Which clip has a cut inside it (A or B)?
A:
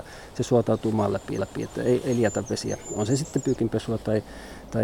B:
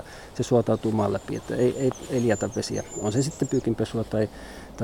A